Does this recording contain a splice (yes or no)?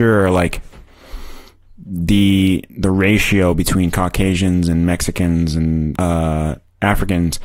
yes